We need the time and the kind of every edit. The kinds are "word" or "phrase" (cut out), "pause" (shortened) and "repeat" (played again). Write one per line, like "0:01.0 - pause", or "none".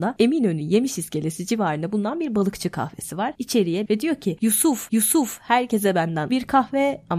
0:03.9 - phrase
0:04.9 - repeat
0:06.3 - word